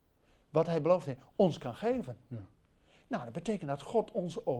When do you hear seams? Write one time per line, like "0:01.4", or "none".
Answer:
none